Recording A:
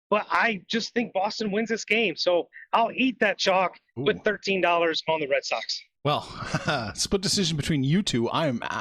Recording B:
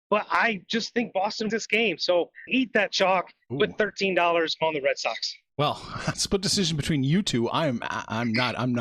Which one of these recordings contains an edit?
B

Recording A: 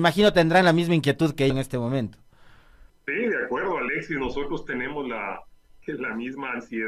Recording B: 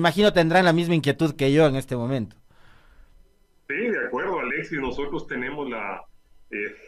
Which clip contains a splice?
A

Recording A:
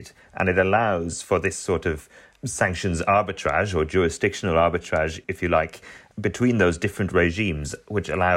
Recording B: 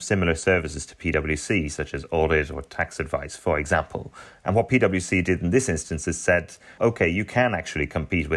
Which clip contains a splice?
B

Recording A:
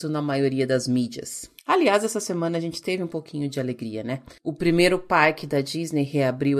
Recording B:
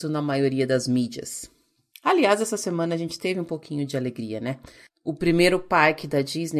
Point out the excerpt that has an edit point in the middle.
A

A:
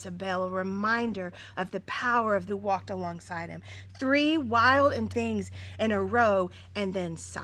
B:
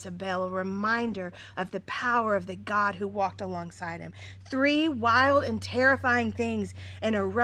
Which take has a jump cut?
A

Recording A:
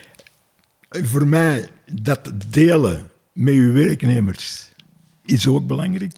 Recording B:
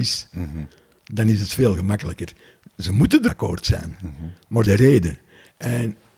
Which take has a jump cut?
B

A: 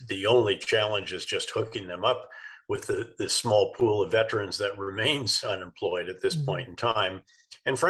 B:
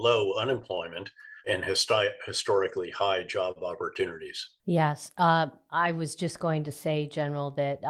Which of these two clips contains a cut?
B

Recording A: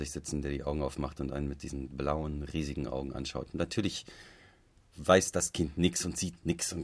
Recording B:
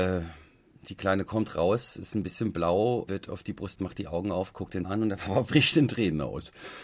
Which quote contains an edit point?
B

